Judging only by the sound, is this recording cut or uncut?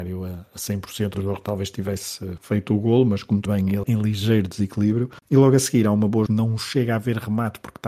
cut